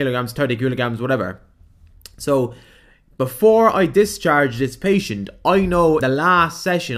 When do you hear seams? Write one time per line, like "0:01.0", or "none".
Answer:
0:06.0